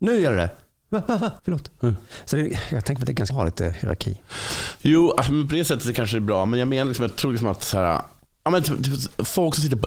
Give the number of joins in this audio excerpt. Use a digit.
2